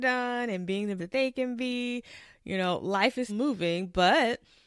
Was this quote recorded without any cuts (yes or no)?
no